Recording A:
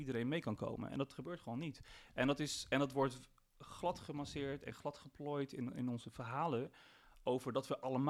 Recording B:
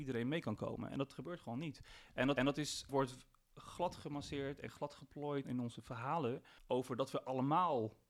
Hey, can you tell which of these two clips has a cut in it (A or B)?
B